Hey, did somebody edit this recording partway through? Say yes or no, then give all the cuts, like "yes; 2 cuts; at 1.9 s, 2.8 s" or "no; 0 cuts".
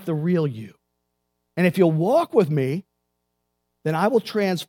no; 0 cuts